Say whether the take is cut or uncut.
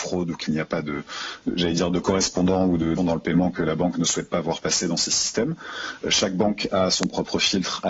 cut